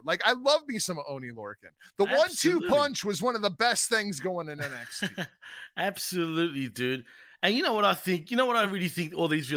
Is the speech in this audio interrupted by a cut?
no; 0 cuts

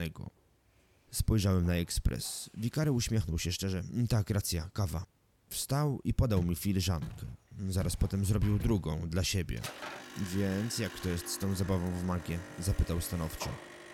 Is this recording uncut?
yes; 0 cuts

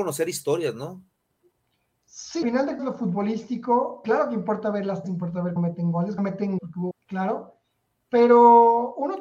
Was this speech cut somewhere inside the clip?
yes; 8 cuts; at 2.4 s, 2.8 s, 4.0 s, 5.0 s, 5.6 s, 6.2 s, 6.6 s, 6.9 s

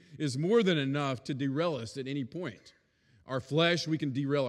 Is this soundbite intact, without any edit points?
yes; 0 cuts

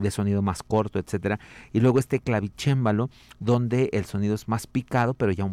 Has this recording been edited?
no; 0 cuts

